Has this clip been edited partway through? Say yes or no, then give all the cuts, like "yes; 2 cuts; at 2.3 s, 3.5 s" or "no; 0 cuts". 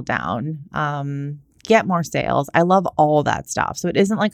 no; 0 cuts